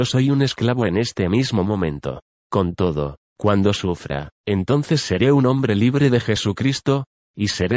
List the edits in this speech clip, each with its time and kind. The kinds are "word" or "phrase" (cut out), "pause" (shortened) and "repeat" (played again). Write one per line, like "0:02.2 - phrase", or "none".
0:02.3 - pause
0:03.3 - pause
0:04.3 - pause